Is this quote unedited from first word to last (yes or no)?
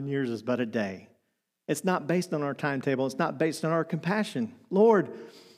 yes